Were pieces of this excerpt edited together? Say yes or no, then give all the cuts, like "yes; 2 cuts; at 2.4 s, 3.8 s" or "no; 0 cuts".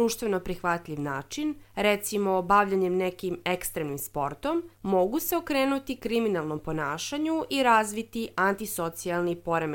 yes; 2 cuts; at 1.6 s, 4.7 s